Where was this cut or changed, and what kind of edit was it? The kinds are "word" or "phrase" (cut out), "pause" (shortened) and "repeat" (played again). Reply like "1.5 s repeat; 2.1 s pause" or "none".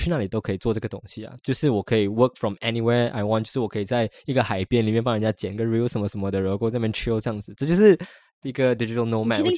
8.4 s phrase